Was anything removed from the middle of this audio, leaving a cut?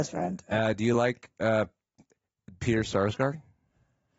no; 0 cuts

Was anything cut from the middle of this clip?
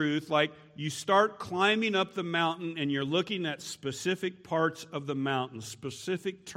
no; 0 cuts

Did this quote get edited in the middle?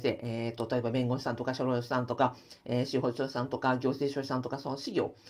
no; 0 cuts

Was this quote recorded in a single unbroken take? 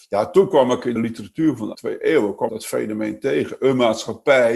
no; 3 cuts; at 1.0 s, 1.7 s, 2.5 s

